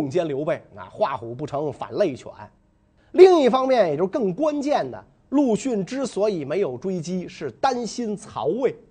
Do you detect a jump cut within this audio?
no; 0 cuts

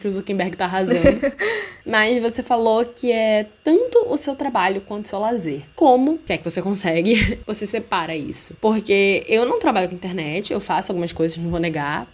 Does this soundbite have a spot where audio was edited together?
yes; 1 cut; at 1.8 s

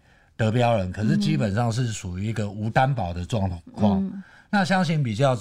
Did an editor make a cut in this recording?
no; 0 cuts

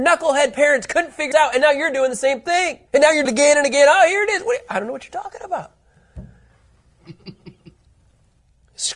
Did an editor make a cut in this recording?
yes; 3 cuts; at 1.3 s, 2.9 s, 3.3 s

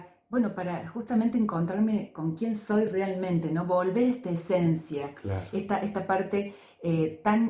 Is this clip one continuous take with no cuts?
yes; 0 cuts

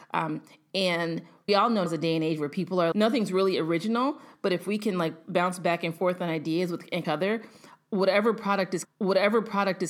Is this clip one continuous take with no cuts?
no; 5 cuts; at 1.5 s, 1.9 s, 2.9 s, 7.0 s, 8.8 s

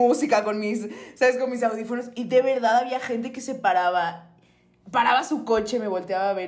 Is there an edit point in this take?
no; 0 cuts

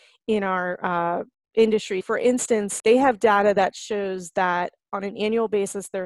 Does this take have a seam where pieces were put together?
yes; 2 cuts; at 2.0 s, 2.8 s

